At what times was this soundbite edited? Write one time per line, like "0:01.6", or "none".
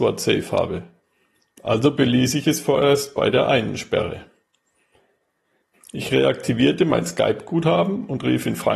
none